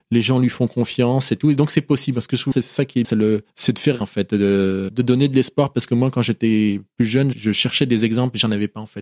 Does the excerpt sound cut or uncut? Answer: cut